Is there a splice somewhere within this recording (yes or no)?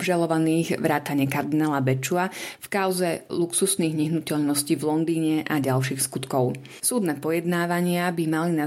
no